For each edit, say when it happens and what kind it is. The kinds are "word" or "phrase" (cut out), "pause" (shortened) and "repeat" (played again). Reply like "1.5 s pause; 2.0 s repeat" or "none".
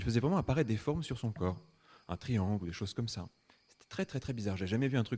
none